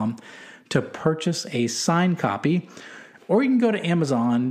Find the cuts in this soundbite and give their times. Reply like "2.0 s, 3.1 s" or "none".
none